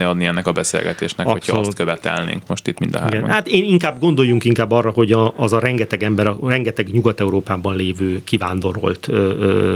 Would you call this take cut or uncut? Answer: uncut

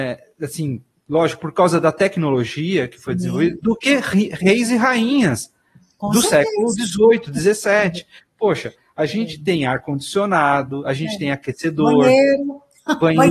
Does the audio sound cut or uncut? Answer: uncut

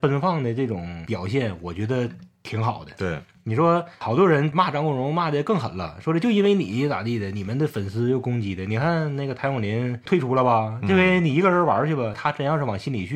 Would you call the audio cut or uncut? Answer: cut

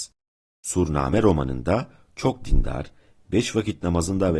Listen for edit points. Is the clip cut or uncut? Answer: uncut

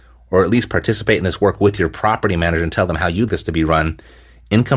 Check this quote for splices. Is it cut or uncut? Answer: cut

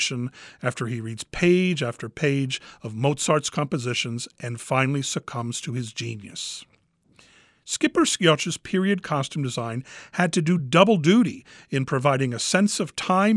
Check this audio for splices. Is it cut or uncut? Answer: uncut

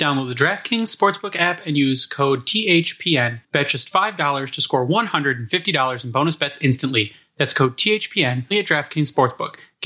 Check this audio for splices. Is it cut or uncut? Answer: cut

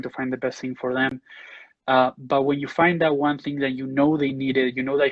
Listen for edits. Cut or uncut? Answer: uncut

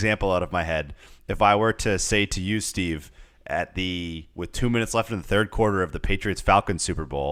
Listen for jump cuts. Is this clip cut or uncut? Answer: uncut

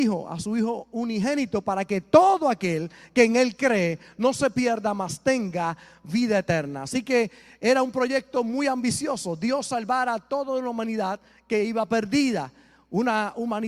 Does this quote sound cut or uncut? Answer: uncut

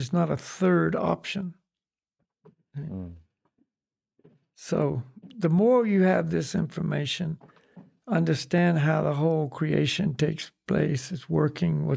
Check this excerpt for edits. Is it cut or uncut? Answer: uncut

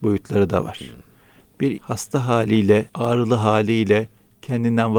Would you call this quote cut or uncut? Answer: cut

